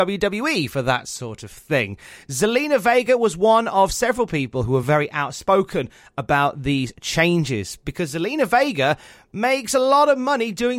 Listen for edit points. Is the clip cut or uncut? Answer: uncut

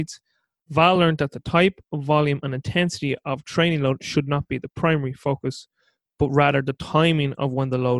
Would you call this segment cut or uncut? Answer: uncut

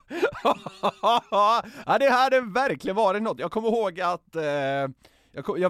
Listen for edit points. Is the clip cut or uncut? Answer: uncut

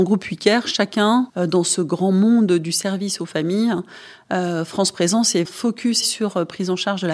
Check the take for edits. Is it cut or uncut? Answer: cut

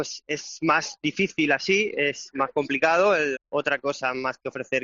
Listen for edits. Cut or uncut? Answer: cut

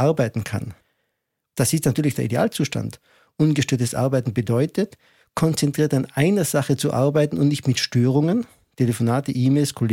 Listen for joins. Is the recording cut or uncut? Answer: uncut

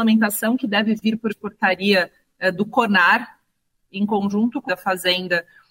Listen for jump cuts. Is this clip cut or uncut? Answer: cut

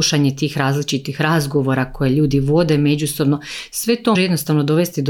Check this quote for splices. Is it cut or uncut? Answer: cut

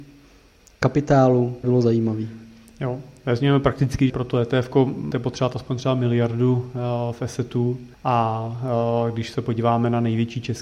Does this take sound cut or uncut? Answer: cut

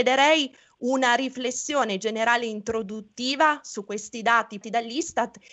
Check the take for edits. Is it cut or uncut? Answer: cut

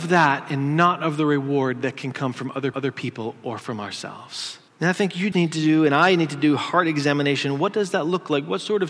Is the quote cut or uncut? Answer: cut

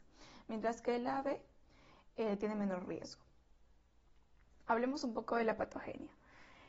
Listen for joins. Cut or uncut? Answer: uncut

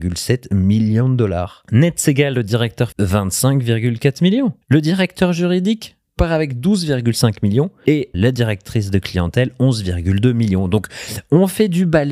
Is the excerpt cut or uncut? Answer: cut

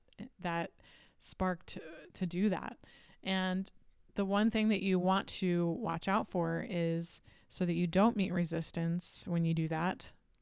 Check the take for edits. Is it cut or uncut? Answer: uncut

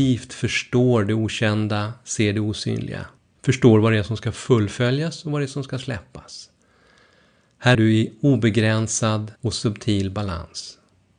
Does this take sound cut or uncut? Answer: cut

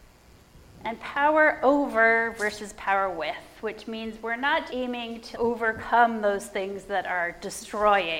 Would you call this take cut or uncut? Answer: cut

